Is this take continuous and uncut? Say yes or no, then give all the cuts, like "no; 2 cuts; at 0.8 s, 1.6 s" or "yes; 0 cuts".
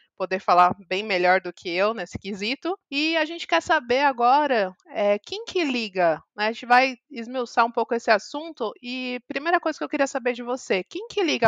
no; 1 cut; at 2.8 s